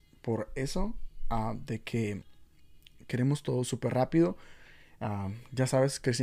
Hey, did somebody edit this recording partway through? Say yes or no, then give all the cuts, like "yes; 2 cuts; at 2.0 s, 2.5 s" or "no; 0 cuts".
no; 0 cuts